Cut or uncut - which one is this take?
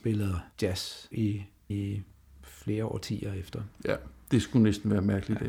cut